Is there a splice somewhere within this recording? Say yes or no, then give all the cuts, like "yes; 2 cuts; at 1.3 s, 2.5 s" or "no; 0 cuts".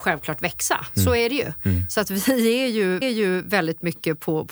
yes; 1 cut; at 3.0 s